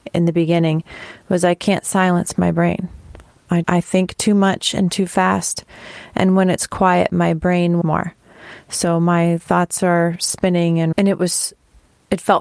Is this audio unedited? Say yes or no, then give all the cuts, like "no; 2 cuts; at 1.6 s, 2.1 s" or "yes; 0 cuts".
no; 3 cuts; at 3.6 s, 7.8 s, 10.9 s